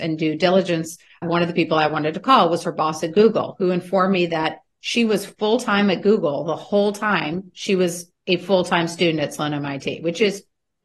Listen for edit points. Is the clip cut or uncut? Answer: uncut